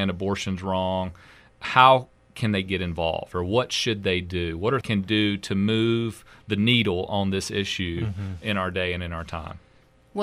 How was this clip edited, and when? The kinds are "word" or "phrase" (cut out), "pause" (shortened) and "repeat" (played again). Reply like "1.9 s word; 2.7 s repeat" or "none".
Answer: 4.8 s phrase